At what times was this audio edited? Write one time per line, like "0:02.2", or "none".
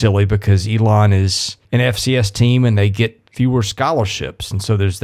0:01.6